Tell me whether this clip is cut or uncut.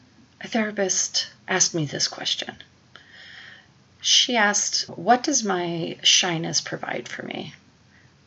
cut